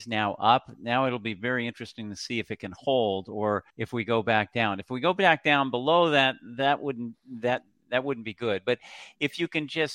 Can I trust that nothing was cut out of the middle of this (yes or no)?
no